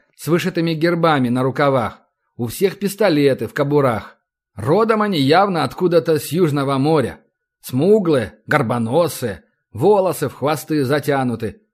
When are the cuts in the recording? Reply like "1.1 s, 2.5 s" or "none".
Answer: none